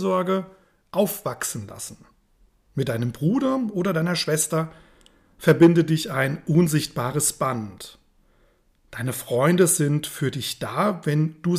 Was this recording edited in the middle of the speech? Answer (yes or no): no